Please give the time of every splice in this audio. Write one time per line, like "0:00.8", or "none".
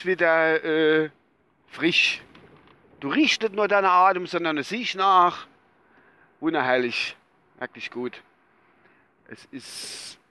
none